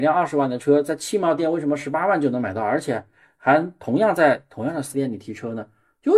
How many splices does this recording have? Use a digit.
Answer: 1